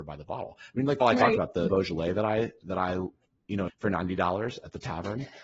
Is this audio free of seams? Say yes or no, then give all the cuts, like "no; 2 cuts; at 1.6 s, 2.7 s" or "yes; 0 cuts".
no; 3 cuts; at 1.0 s, 1.7 s, 3.7 s